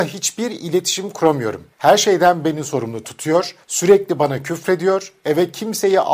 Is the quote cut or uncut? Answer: cut